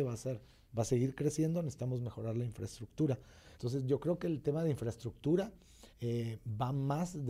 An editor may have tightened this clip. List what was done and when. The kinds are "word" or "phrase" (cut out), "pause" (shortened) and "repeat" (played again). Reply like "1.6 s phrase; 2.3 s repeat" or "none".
3.5 s pause; 5.9 s pause